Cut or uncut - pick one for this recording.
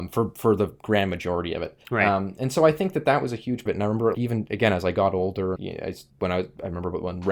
cut